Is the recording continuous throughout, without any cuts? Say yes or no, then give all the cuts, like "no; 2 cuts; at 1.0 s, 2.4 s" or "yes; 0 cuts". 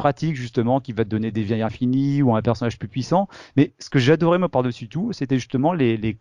yes; 0 cuts